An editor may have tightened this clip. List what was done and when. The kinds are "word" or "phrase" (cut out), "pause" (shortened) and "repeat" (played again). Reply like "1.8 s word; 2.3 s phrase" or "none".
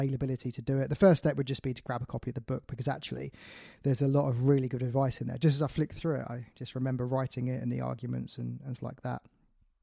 8.8 s word